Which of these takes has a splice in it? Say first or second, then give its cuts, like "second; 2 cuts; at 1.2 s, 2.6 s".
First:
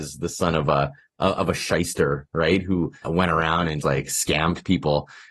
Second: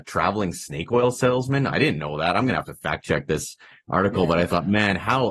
first; 2 cuts; at 3.0 s, 3.8 s